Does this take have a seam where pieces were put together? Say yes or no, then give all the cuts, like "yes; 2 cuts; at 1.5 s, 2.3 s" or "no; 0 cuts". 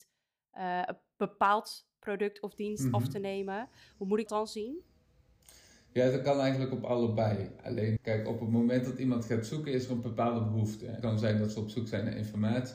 yes; 3 cuts; at 4.3 s, 8.0 s, 11.0 s